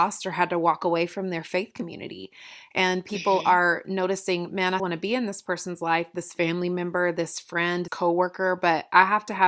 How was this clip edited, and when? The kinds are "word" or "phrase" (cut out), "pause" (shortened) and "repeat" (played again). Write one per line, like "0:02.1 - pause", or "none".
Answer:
0:04.8 - word
0:07.9 - word